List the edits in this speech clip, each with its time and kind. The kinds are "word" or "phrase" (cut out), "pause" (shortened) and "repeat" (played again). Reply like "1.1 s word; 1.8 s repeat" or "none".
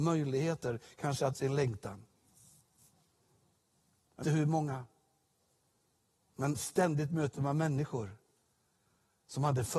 1.3 s word; 4.2 s word